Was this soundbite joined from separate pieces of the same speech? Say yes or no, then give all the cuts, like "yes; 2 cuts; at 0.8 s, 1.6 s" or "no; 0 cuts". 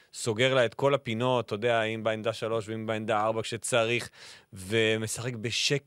no; 0 cuts